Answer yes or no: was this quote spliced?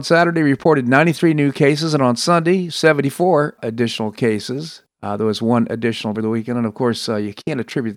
yes